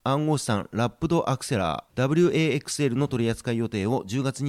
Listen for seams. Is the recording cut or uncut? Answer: uncut